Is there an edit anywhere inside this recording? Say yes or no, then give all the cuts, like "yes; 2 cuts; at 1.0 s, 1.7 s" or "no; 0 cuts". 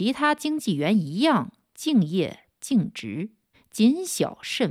yes; 1 cut; at 3.5 s